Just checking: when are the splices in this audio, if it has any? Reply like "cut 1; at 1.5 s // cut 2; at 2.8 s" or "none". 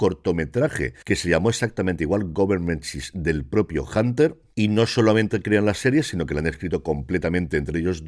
none